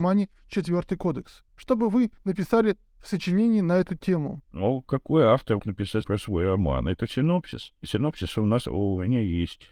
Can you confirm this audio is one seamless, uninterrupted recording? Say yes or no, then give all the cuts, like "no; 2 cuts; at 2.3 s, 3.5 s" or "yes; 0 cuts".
no; 5 cuts; at 1.5 s, 2.9 s, 4.4 s, 5.6 s, 6.0 s